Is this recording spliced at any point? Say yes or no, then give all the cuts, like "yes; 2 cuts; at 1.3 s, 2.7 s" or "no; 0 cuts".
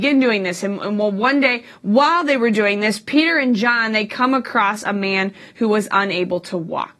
no; 0 cuts